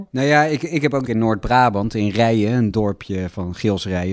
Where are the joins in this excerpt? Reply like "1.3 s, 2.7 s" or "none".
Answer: 1.1 s